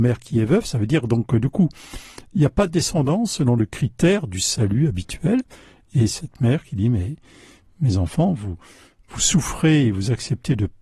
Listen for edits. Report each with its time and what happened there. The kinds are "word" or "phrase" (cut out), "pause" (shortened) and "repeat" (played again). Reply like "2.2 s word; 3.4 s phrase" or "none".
none

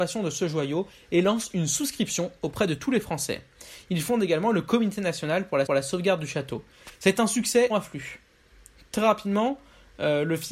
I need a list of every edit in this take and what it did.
5.7 s repeat; 7.7 s phrase

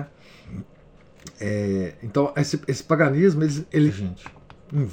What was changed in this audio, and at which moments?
3.9 s word

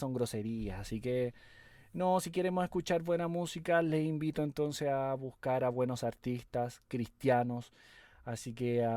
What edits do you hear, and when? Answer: none

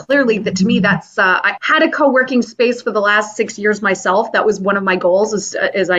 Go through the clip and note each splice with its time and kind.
1.6 s word

